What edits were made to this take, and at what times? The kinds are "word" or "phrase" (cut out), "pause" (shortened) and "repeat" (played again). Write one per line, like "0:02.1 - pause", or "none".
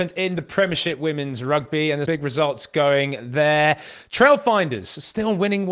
0:02.1 - word